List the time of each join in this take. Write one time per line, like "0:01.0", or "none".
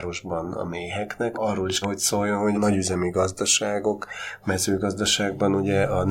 0:01.3
0:01.8
0:02.5